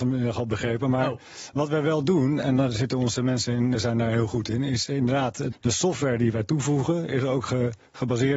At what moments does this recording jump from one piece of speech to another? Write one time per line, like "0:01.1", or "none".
0:03.7
0:05.5